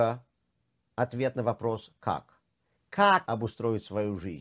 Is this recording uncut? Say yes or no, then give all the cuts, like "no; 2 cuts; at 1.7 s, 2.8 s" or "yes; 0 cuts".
no; 1 cut; at 3.3 s